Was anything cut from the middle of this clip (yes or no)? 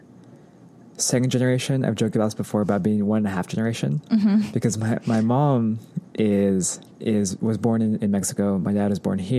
yes